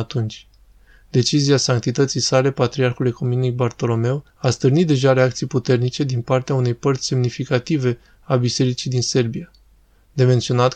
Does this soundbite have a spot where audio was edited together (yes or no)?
yes